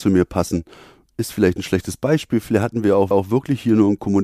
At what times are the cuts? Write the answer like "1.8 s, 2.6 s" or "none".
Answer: 3.1 s